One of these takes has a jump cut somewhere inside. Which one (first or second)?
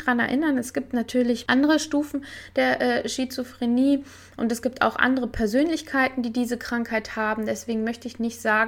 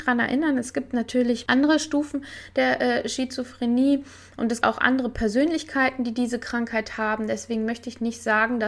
second